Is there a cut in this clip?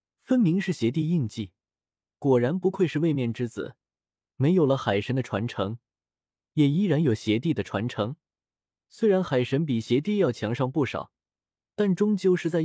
no; 0 cuts

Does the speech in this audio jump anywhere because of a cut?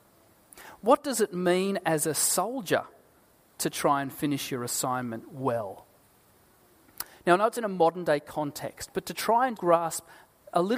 yes; 1 cut; at 9.6 s

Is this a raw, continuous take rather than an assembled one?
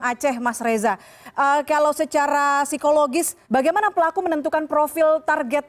no; 1 cut; at 3.4 s

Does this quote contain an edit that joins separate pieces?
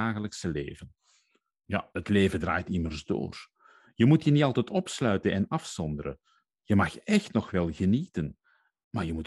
no; 0 cuts

